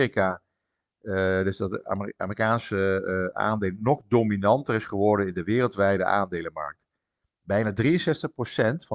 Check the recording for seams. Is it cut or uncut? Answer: uncut